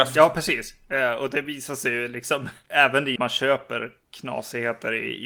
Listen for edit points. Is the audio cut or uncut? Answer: cut